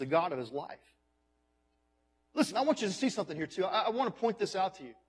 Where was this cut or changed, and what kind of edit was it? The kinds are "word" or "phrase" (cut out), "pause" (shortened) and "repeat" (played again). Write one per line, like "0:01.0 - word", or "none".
none